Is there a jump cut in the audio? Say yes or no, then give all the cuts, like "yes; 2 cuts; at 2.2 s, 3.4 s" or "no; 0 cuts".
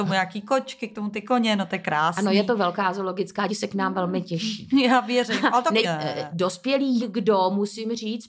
yes; 3 cuts; at 3.5 s, 5.8 s, 7.0 s